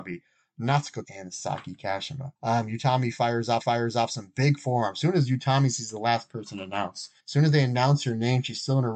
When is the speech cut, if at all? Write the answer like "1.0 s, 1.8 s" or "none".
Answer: 1.0 s, 2.4 s, 3.6 s, 7.2 s